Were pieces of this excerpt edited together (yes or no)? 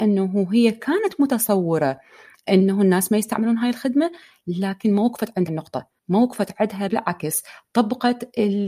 yes